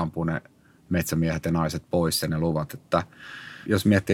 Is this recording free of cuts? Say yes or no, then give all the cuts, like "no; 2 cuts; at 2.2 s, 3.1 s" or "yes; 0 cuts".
no; 1 cut; at 2.2 s